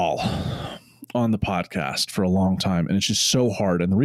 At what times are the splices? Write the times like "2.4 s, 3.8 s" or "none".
none